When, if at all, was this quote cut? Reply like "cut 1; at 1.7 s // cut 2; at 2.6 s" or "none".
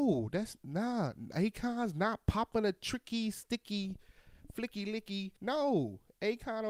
cut 1; at 5.4 s